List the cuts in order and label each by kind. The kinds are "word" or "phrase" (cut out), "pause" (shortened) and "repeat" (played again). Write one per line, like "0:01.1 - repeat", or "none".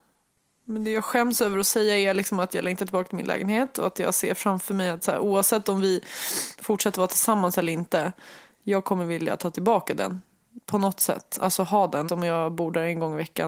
0:12.1 - word